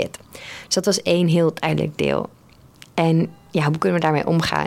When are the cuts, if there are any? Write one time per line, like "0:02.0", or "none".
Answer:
none

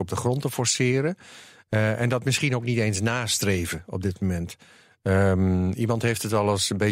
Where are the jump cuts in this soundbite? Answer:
none

